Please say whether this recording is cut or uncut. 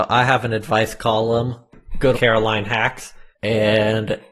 cut